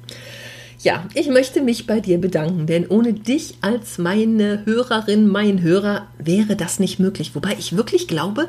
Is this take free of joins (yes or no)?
yes